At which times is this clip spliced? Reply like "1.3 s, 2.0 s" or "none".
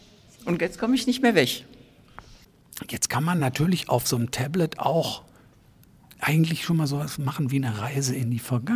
none

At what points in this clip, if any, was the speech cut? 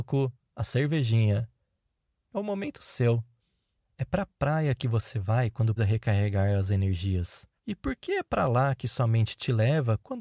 5.8 s, 7.6 s

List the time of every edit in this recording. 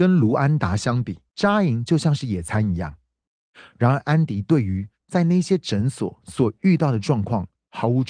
1.3 s

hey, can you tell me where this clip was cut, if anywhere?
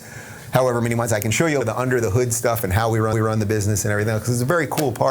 1.6 s, 3.1 s

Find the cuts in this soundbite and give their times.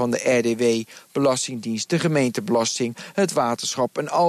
none

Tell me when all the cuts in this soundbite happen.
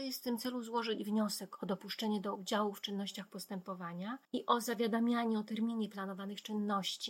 4.2 s

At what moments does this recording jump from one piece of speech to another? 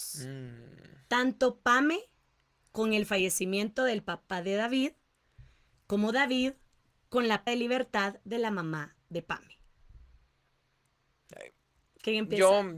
7.5 s

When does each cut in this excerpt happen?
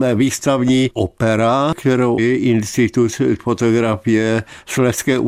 0.9 s, 2.2 s, 3.4 s

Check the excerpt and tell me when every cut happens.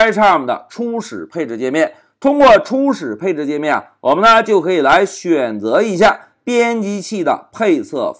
none

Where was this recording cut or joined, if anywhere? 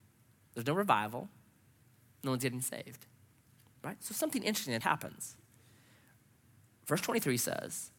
4.8 s

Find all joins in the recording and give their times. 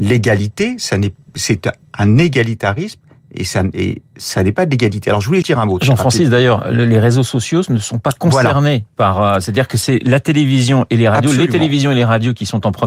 5.4 s

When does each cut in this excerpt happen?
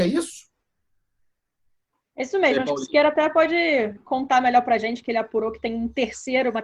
none

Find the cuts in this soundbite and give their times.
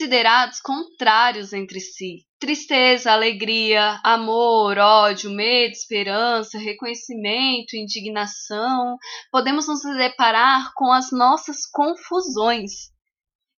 2.3 s

